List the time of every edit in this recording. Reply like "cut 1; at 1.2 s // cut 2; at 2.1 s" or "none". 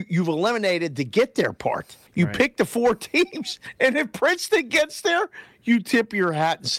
cut 1; at 2.1 s